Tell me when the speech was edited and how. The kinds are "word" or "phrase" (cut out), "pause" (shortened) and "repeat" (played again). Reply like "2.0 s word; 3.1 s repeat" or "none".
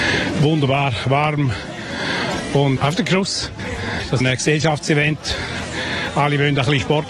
2.8 s word; 4.2 s phrase